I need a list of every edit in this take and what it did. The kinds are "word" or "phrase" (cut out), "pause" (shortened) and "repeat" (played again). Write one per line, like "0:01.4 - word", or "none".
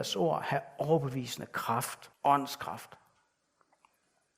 0:02.1 - pause

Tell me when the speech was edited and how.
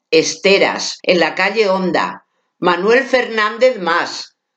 0:01.0 - pause

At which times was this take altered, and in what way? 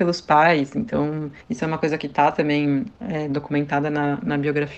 0:01.4 - pause
0:02.9 - pause

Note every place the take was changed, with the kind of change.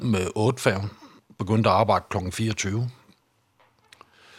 none

